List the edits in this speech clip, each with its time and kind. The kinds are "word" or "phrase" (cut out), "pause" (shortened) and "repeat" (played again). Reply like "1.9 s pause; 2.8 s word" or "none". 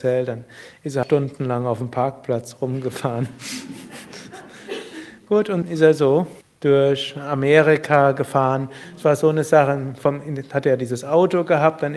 1.0 s word; 5.6 s word; 6.4 s pause